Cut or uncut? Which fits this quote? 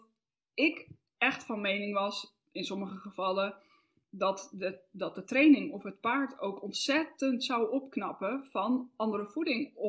uncut